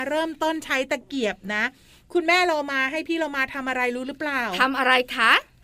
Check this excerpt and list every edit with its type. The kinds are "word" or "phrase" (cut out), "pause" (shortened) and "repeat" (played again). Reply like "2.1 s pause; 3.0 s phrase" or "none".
none